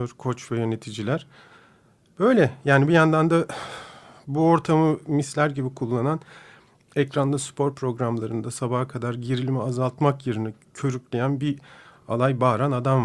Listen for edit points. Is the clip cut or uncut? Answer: uncut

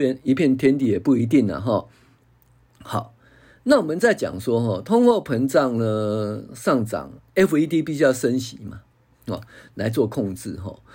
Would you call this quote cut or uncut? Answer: uncut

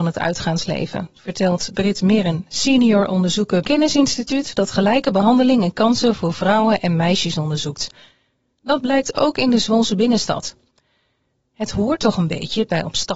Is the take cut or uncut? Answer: cut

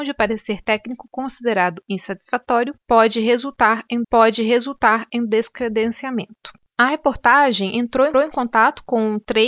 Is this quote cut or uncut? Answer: cut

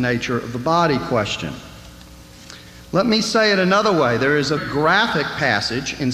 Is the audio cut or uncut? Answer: cut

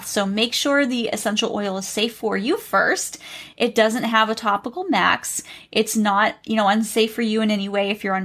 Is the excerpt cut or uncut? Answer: uncut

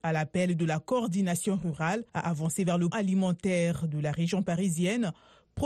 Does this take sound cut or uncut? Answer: cut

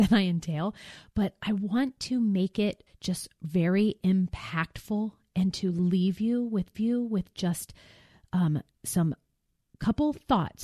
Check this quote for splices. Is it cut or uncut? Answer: cut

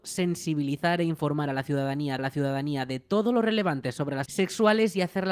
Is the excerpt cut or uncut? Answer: cut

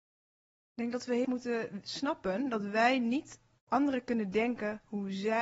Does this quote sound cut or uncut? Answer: cut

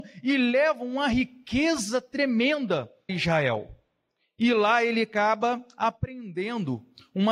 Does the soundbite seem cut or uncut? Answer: cut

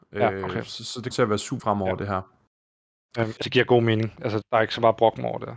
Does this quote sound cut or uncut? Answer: cut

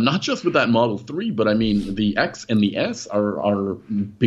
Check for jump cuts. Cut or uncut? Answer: uncut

